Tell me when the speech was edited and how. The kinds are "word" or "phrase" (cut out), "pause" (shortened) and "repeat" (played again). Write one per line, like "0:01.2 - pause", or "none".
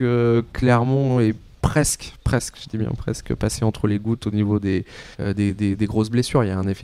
0:05.1 - pause